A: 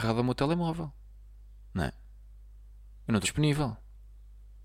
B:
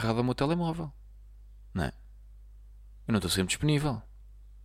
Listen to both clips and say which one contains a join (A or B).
A